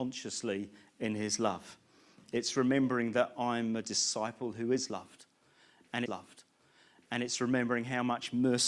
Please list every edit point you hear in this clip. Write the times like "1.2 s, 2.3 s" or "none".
6.1 s